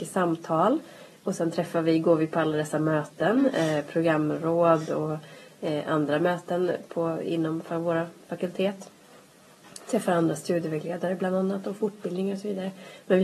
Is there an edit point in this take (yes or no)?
no